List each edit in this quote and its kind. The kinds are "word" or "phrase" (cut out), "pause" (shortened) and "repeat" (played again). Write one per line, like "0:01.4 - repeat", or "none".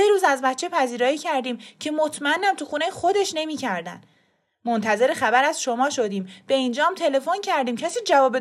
none